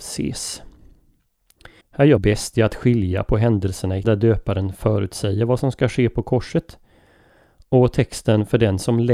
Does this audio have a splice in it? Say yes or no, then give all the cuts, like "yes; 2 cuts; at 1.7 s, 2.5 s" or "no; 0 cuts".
yes; 3 cuts; at 1.8 s, 2.2 s, 4.0 s